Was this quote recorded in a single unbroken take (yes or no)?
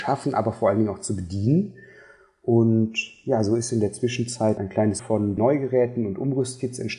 no